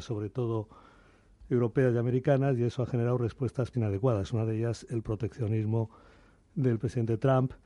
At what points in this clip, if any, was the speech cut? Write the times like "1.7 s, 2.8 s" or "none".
3.7 s